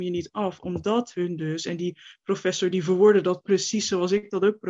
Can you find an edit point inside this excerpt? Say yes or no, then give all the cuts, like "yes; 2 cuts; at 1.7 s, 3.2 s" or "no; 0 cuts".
no; 0 cuts